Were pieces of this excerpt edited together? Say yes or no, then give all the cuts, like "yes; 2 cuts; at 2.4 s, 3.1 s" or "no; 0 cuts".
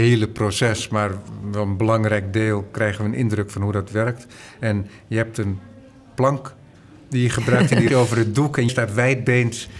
yes; 2 cuts; at 7.9 s, 8.7 s